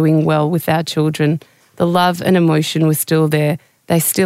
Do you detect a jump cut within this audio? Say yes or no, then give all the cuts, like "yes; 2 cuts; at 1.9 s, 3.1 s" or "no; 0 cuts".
no; 0 cuts